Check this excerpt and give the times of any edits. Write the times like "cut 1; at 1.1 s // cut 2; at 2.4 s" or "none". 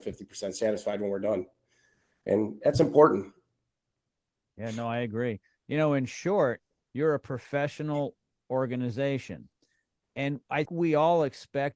cut 1; at 10.7 s